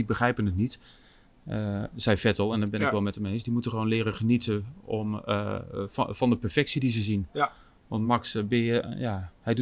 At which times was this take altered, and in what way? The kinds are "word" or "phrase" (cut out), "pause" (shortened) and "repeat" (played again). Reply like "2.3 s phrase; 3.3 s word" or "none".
none

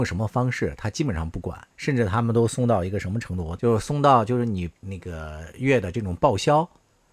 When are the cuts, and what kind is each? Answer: 1.7 s pause

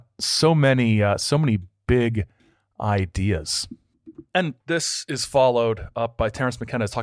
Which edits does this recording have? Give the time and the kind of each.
4.6 s word

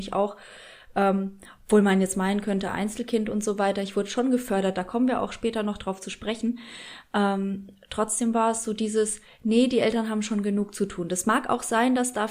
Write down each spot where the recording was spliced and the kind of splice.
none

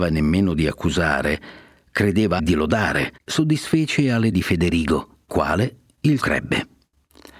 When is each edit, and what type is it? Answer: 2.4 s word; 3.2 s pause; 4.3 s word; 5.3 s word; 6.2 s word

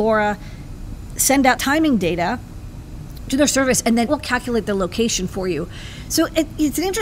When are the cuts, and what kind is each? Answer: 1.6 s word; 4.1 s word

